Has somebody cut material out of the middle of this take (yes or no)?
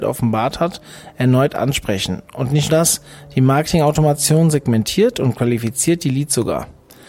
yes